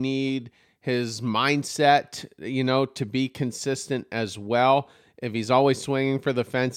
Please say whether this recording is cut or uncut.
uncut